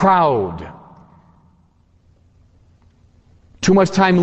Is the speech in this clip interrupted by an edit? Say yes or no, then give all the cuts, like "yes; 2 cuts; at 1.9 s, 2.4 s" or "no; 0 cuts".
no; 0 cuts